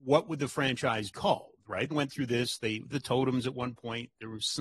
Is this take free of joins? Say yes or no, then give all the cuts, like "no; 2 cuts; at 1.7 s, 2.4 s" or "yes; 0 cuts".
no; 3 cuts; at 1.1 s, 1.9 s, 2.9 s